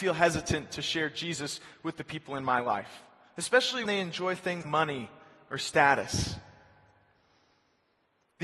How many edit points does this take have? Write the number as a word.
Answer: two